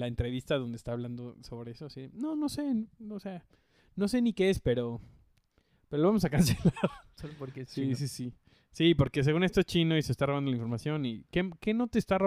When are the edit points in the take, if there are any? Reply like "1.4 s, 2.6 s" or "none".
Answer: none